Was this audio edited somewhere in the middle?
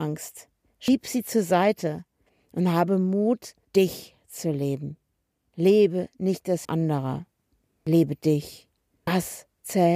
yes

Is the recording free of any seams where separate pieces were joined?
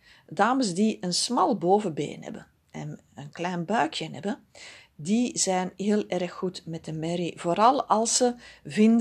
yes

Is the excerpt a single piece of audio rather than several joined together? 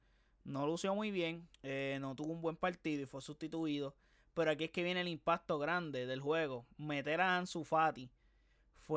no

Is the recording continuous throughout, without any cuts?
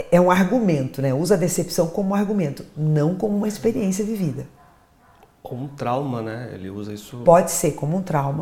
yes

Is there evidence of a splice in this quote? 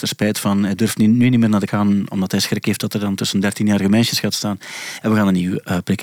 yes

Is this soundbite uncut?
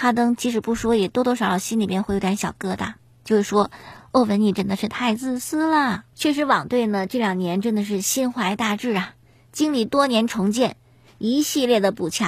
no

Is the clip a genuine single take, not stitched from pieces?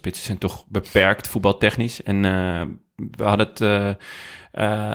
yes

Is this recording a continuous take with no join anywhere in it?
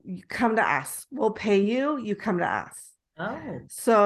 yes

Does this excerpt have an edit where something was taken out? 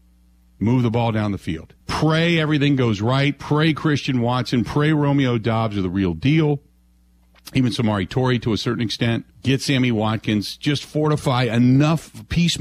yes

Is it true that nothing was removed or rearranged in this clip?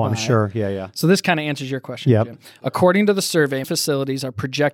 no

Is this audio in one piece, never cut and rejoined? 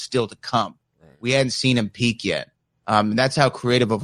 yes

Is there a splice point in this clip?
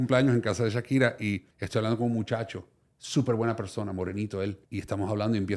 yes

